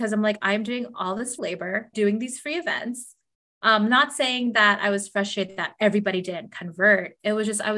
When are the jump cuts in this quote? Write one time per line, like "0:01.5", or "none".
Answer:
0:01.4
0:01.9